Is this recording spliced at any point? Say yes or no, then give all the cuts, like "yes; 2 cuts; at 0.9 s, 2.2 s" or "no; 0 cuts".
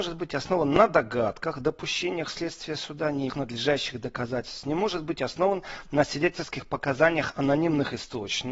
yes; 1 cut; at 3.3 s